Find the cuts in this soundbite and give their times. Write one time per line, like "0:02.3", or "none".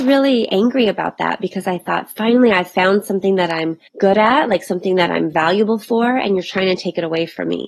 0:03.9